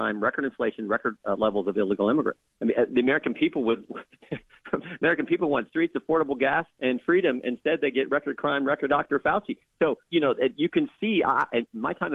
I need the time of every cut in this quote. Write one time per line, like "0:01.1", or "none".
0:02.5
0:04.8
0:05.7
0:06.7
0:08.9
0:10.1